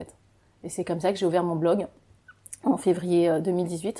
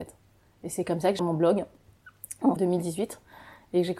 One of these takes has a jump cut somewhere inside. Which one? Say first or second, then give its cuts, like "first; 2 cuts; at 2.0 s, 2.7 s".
second; 2 cuts; at 1.2 s, 2.6 s